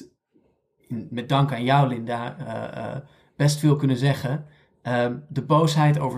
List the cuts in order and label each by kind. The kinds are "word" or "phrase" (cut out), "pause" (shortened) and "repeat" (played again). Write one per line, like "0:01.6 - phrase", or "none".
none